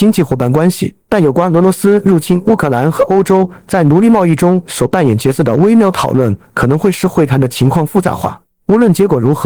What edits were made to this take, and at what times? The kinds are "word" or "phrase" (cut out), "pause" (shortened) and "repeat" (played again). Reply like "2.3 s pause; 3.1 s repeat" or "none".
1.0 s pause; 8.5 s pause

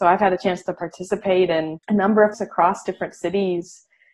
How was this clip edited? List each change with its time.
1.8 s pause; 2.3 s word

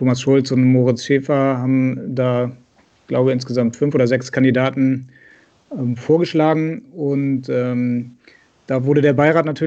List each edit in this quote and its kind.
none

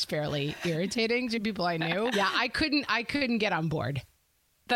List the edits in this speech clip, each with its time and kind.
2.1 s word

